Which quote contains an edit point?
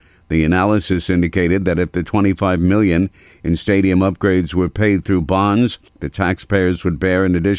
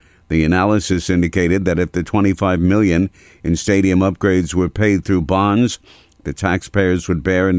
first; 1 cut; at 5.9 s

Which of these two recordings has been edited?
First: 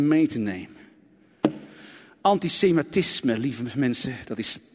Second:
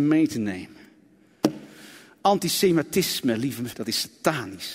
second; 1 cut; at 3.7 s

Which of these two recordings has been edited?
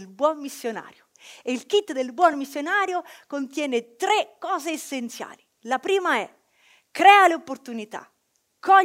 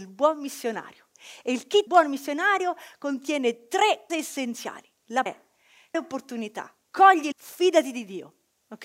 second; 6 cuts; at 1.9 s, 4.1 s, 5.3 s, 5.9 s, 6.9 s, 7.3 s

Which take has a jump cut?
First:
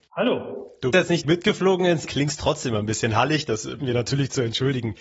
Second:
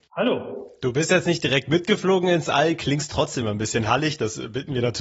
first; 4 cuts; at 0.9 s, 1.2 s, 2.0 s, 3.8 s

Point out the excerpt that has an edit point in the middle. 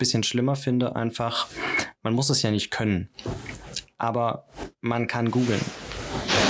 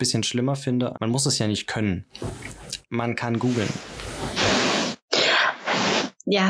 second; 2 cuts; at 0.9 s, 2.8 s

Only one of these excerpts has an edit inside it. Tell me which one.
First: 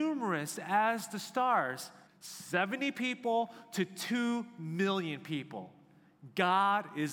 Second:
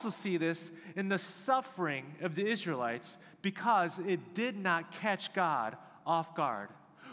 first; 1 cut; at 2.1 s

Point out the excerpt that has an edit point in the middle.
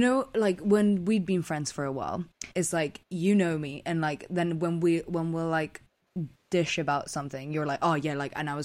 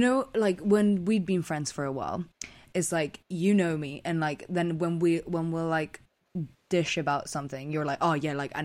first; 1 cut; at 2.5 s

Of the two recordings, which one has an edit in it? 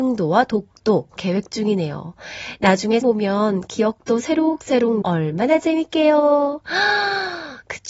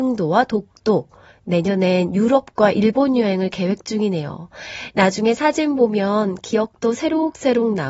first; 3 cuts; at 1.2 s, 3.0 s, 5.0 s

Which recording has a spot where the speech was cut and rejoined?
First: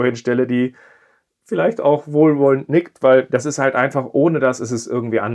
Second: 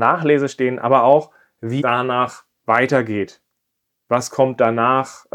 second; 1 cut; at 1.8 s

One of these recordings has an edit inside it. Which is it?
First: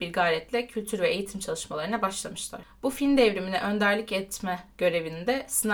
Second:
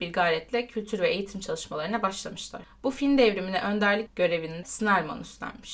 second; 2 cuts; at 4.1 s, 4.6 s

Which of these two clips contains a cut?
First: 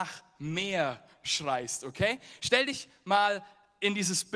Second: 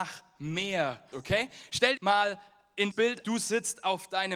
second; 4 cuts; at 1.1 s, 2.0 s, 2.9 s, 3.2 s

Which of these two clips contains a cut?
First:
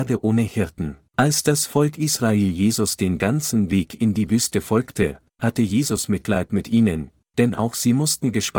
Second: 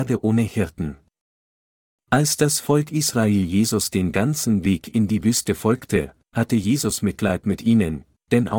first; 1 cut; at 1.1 s

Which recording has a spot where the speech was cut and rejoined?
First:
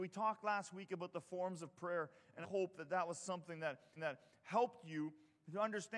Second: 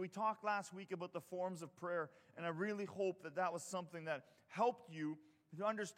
first; 2 cuts; at 2.4 s, 4.0 s

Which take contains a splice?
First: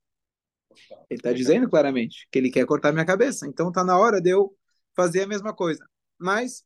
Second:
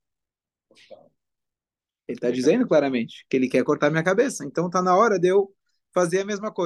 first; 1 cut; at 1.0 s

